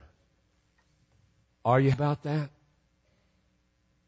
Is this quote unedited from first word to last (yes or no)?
no